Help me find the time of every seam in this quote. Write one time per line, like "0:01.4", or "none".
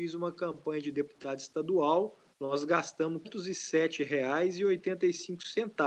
0:02.3
0:03.2